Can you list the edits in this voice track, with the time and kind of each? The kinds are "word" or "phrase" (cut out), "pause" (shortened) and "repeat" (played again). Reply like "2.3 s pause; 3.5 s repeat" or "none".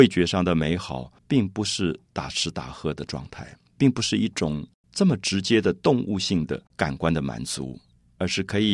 1.2 s pause; 4.8 s pause; 6.7 s pause